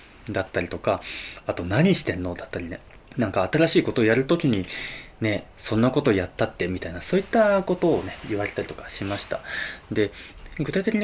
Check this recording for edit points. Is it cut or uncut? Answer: cut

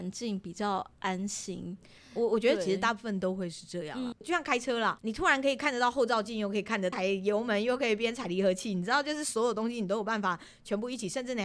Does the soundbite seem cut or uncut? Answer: uncut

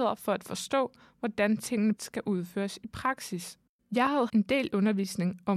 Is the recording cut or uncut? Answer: cut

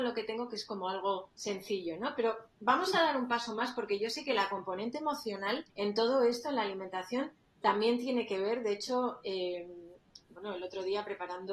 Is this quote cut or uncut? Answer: cut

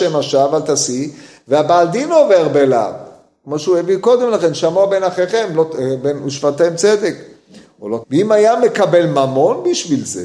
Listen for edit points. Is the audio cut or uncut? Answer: cut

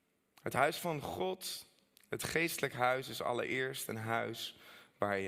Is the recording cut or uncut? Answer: uncut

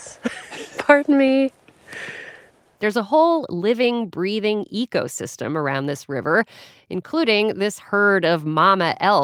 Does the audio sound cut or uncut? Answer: uncut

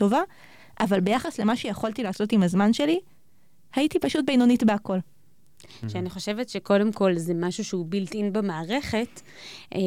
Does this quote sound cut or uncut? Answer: uncut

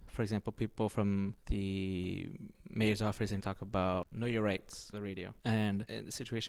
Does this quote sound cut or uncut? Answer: cut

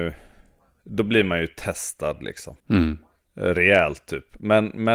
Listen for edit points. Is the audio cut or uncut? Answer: cut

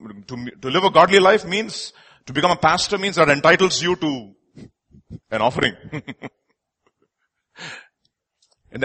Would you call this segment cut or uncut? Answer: cut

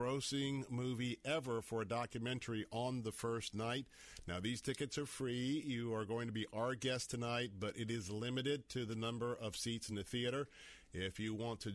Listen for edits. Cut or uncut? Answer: uncut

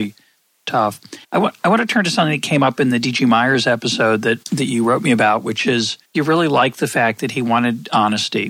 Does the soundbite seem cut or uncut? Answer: cut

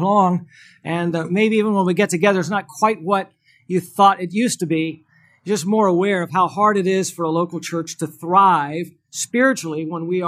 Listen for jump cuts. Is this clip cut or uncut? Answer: uncut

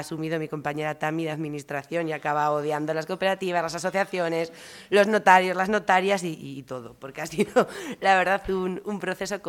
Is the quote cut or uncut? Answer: uncut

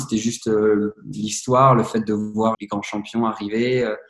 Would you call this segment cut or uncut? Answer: cut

